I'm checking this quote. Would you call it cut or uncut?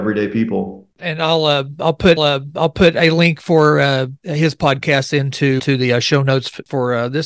cut